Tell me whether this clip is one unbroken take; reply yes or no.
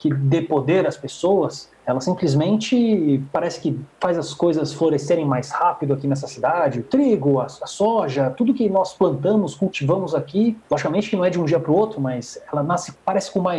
yes